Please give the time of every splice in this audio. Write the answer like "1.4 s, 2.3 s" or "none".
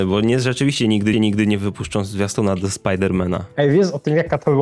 1.1 s